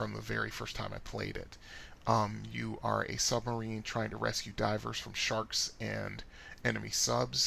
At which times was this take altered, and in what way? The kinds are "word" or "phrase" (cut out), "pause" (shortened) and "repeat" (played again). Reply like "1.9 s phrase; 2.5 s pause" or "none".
none